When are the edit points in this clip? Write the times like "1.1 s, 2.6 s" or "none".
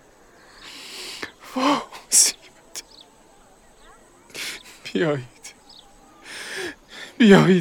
none

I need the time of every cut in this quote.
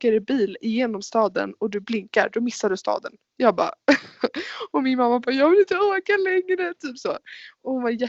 none

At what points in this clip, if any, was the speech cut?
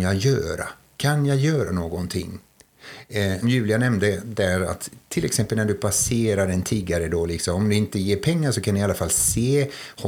3.4 s

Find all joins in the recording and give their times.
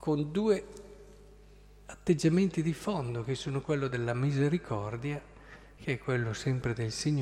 none

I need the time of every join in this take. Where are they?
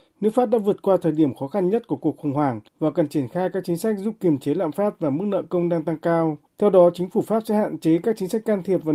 2.7 s, 6.5 s

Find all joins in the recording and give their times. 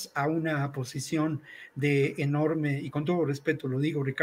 none

